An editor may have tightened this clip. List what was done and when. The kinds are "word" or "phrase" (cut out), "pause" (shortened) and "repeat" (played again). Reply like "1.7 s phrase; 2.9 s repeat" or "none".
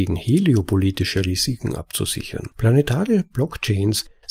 2.5 s pause